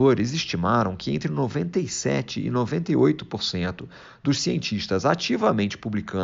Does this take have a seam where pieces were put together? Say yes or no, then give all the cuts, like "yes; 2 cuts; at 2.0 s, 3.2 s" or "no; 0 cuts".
no; 0 cuts